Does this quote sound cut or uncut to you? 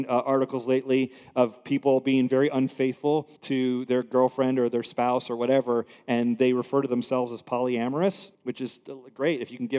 cut